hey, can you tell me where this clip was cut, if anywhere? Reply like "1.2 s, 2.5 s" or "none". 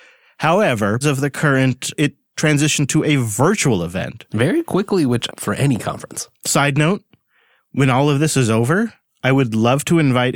1.0 s, 2.0 s, 5.3 s